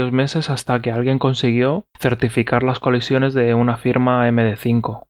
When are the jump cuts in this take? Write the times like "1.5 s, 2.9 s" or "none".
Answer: 1.9 s